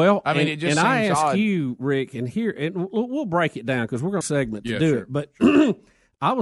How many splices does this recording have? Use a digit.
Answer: 1